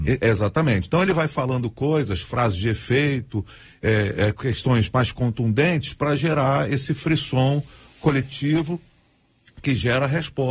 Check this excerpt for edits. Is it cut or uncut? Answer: uncut